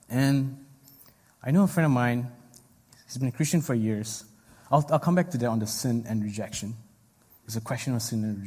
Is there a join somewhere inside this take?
no; 0 cuts

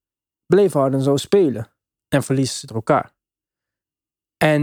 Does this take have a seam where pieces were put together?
yes; 1 cut; at 2.7 s

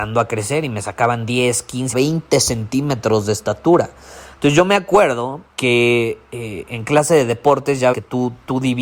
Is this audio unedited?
no; 3 cuts; at 1.9 s, 5.5 s, 7.9 s

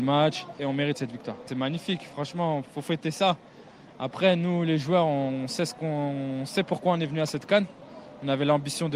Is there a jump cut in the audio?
no; 0 cuts

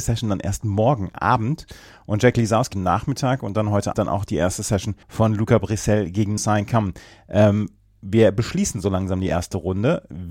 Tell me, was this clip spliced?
yes; 4 cuts; at 2.7 s, 3.9 s, 5.0 s, 6.4 s

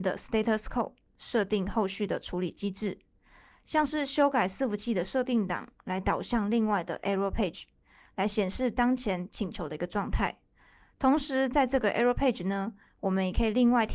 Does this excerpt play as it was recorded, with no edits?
yes; 0 cuts

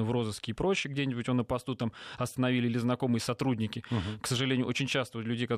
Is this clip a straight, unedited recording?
yes; 0 cuts

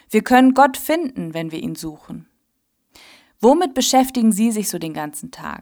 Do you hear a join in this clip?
no; 0 cuts

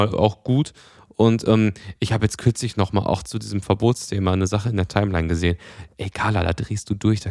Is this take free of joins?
yes; 0 cuts

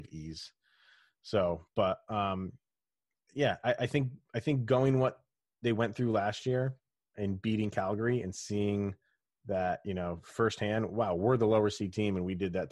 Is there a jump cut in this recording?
no; 0 cuts

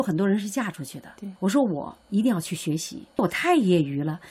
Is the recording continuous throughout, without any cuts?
no; 1 cut; at 1.4 s

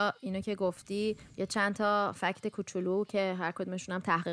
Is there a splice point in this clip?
yes; 1 cut; at 2.1 s

